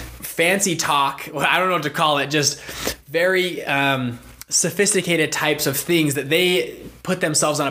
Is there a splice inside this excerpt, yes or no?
no